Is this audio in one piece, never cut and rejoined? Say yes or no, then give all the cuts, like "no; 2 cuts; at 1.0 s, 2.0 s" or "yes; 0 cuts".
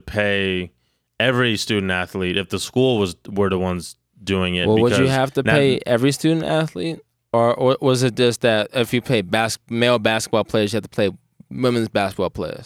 yes; 0 cuts